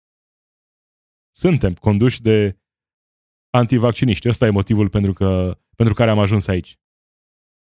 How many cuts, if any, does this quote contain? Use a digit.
0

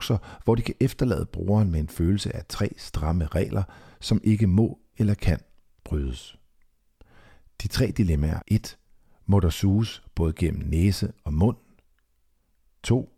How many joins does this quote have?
1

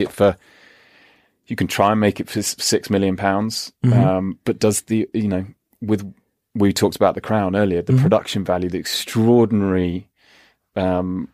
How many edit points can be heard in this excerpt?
0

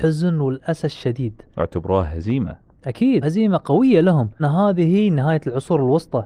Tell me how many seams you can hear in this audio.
3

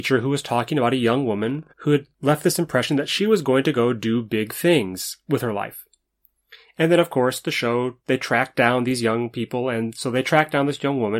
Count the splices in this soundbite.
3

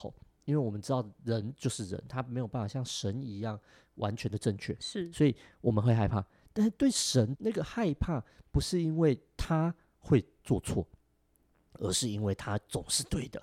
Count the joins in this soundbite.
1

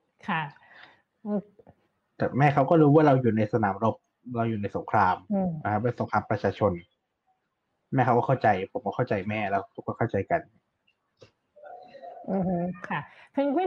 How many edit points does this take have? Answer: 0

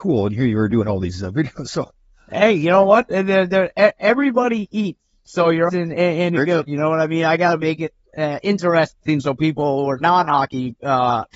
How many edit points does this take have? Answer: 1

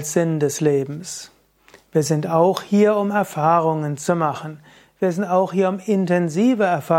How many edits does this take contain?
0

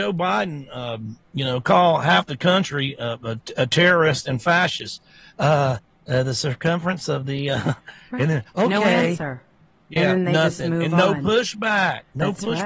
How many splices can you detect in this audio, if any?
0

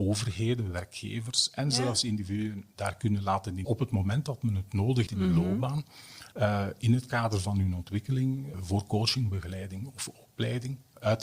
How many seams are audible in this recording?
4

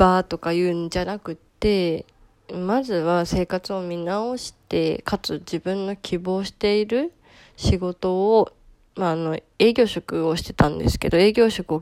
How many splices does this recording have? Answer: 0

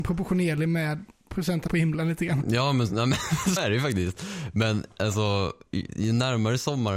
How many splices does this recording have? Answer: 2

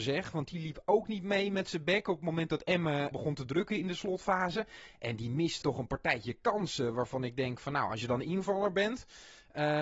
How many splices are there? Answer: 2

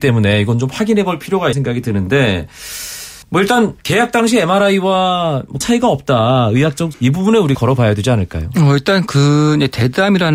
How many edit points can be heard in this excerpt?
6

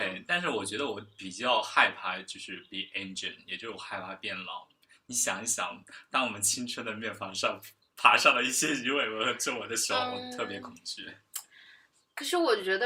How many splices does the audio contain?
0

